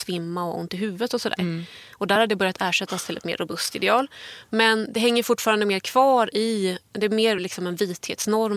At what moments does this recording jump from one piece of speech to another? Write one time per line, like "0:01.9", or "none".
none